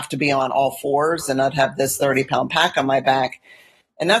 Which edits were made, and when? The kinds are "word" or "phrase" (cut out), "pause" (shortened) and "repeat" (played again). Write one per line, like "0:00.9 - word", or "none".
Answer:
none

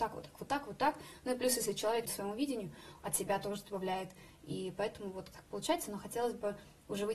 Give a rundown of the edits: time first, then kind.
0:02.1 - phrase
0:05.3 - word

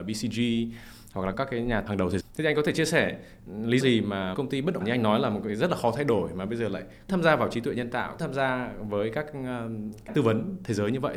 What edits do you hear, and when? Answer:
0:01.3 - word
0:01.9 - word
0:02.2 - word
0:03.8 - word
0:04.3 - word
0:04.8 - word
0:07.1 - word
0:08.2 - word
0:10.1 - word

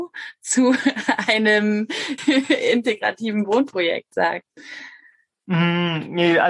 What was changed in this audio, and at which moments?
0:02.2 - word

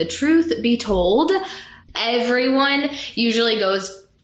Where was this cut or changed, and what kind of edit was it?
0:01.8 - pause

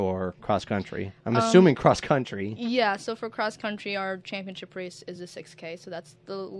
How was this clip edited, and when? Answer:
none

